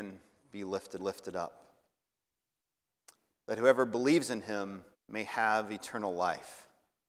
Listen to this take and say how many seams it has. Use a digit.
2